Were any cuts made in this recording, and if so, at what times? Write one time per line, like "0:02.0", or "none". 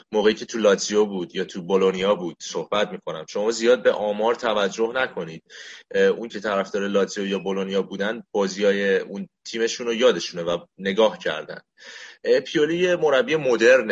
0:06.3